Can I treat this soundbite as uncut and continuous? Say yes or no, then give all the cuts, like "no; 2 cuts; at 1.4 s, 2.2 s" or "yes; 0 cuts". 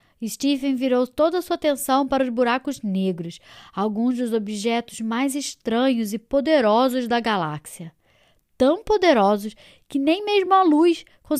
yes; 0 cuts